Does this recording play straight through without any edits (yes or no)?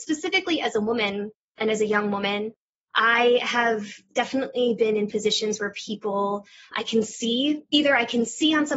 yes